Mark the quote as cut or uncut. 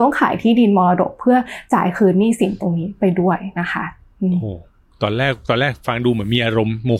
uncut